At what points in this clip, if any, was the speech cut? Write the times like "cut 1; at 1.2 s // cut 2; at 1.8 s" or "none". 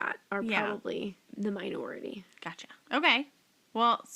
cut 1; at 1.2 s // cut 2; at 2.8 s